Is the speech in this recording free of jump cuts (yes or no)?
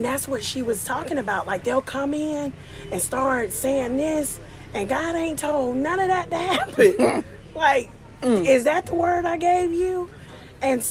yes